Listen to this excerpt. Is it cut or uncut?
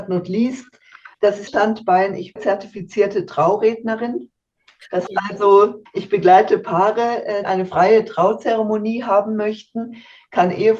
cut